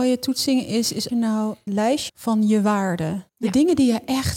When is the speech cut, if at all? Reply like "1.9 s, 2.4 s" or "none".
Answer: 1.1 s, 1.7 s, 2.1 s, 3.3 s